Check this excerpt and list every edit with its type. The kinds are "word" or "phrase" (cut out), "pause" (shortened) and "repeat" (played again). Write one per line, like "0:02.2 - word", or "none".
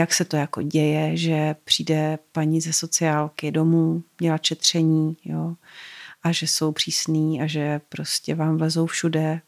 none